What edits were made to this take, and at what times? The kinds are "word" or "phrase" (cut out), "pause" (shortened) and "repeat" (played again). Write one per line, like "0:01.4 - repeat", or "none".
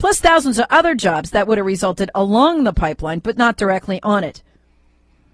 none